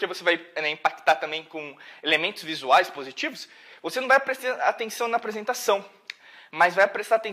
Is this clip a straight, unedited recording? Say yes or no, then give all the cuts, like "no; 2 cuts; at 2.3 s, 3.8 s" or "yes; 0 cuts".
yes; 0 cuts